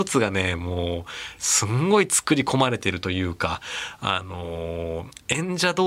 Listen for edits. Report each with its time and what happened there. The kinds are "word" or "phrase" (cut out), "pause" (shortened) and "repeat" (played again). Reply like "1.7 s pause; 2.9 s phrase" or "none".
none